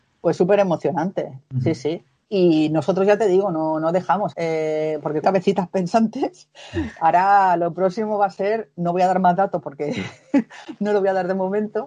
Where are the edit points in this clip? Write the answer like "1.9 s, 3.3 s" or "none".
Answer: 4.3 s, 5.2 s